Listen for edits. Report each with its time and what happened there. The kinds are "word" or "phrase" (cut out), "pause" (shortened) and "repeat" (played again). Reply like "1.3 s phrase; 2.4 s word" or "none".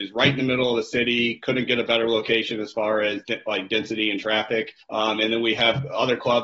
4.8 s pause

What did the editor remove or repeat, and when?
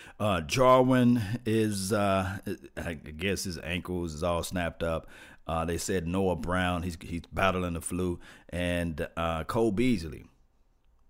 none

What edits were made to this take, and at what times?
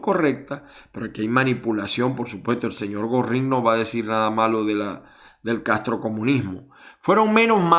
none

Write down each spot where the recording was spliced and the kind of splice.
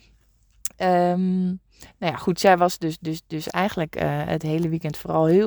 none

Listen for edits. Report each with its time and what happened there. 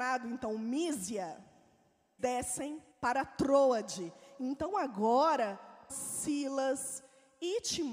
2.2 s word; 2.9 s pause; 5.9 s word

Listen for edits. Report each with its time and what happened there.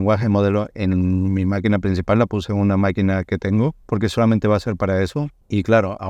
3.8 s pause

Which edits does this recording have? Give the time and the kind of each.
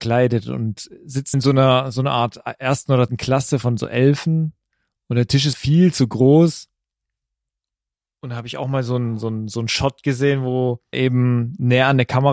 1.3 s word; 3.1 s word; 5.5 s word; 10.9 s word

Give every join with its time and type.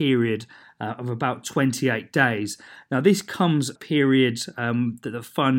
3.8 s phrase

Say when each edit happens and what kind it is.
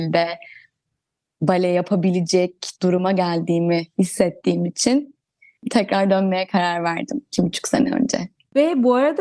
none

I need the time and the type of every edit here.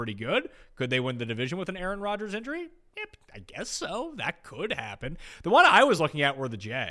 none

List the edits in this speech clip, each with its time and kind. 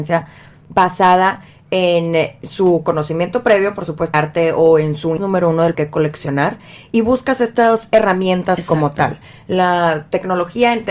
4.1 s word; 5.2 s word; 5.7 s word

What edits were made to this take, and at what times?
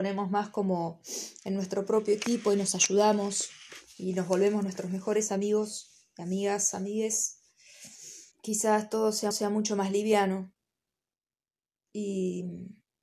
8.3 s pause; 9.3 s repeat

